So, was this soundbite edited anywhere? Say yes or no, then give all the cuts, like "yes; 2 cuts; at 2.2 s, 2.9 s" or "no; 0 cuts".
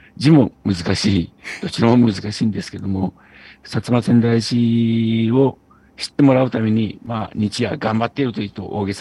no; 0 cuts